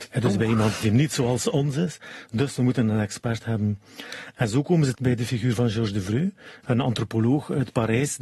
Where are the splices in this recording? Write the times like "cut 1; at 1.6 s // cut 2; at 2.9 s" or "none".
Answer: cut 1; at 4.9 s